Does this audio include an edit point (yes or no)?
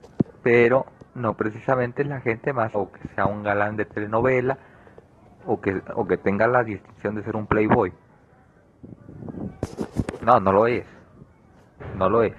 yes